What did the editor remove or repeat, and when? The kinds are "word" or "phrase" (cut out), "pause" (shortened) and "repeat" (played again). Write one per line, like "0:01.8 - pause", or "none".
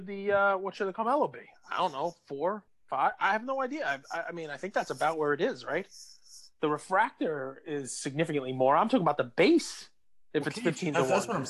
none